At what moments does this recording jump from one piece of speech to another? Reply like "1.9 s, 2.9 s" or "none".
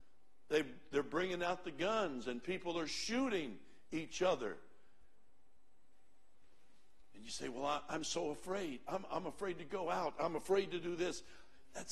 none